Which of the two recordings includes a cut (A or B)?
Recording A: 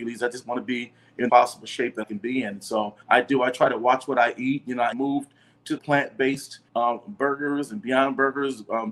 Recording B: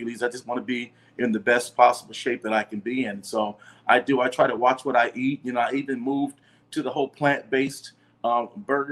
A